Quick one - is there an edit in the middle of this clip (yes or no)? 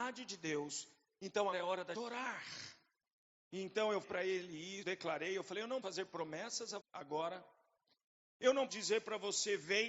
yes